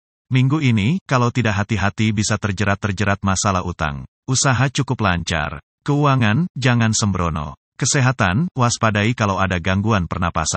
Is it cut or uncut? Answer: cut